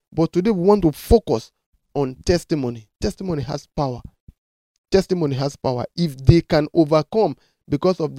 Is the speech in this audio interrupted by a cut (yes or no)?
no